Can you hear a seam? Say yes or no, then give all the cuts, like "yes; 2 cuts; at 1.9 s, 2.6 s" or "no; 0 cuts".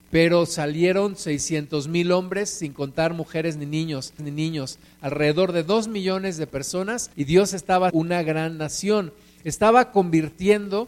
yes; 3 cuts; at 4.2 s, 7.1 s, 7.9 s